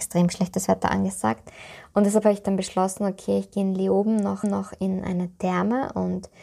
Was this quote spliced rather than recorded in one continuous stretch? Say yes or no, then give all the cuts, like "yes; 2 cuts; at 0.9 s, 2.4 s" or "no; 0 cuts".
yes; 1 cut; at 4.4 s